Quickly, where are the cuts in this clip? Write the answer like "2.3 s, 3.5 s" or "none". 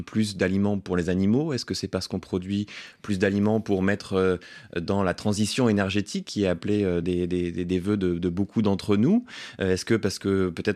none